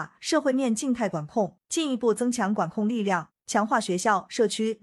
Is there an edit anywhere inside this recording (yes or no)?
yes